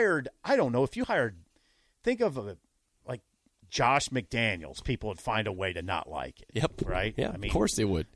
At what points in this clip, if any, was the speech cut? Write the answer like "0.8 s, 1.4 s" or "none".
none